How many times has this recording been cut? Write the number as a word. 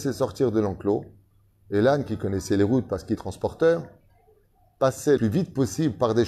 two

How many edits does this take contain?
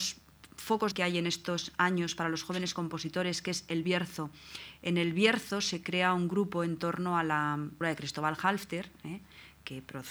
two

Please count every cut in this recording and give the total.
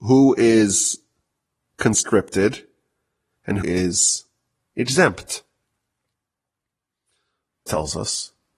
two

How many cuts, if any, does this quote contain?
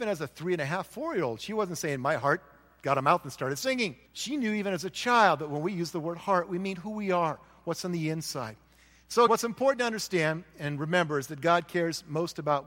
two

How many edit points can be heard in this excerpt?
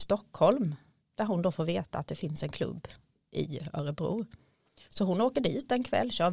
zero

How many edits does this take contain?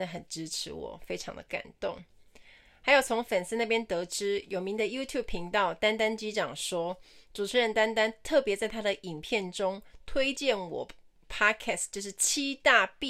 zero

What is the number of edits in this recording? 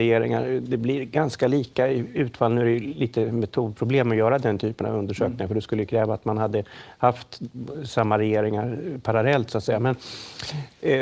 zero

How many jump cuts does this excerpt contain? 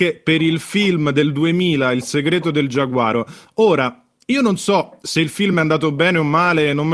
zero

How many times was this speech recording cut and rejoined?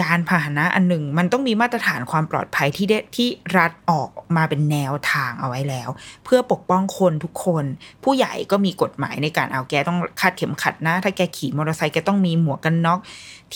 one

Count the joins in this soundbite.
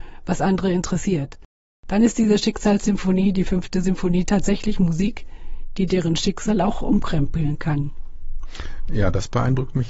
zero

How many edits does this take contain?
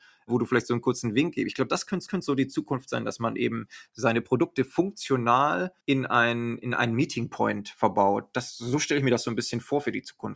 two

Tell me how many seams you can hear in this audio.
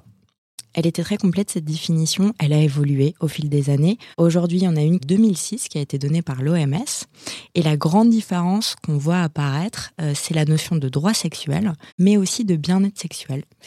three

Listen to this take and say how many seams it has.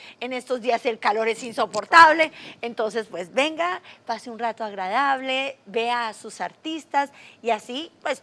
zero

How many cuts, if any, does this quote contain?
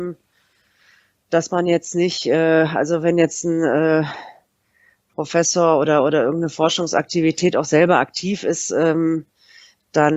zero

